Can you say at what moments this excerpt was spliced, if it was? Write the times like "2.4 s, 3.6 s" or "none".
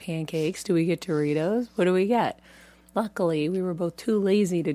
none